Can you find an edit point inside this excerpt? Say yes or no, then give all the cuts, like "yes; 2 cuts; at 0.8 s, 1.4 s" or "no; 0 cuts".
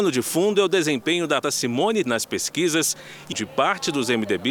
yes; 3 cuts; at 1.4 s, 2.0 s, 3.3 s